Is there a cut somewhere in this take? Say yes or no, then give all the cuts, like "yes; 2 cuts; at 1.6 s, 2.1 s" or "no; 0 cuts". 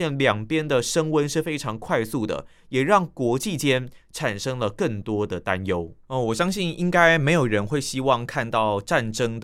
yes; 1 cut; at 6.0 s